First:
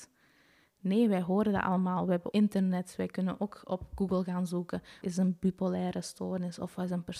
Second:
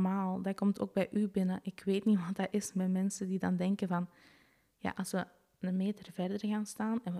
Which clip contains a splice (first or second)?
first